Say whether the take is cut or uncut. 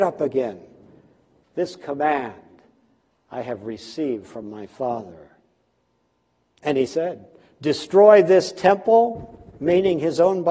uncut